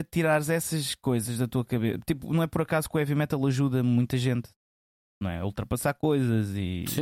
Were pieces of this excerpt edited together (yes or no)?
no